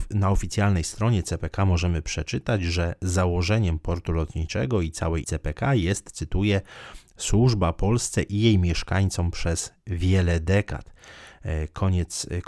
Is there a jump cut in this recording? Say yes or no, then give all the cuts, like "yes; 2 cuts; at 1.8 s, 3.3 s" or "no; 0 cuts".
yes; 1 cut; at 5.2 s